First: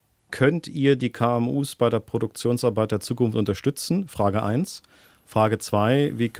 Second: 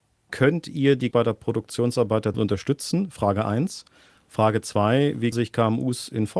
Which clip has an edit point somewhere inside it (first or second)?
second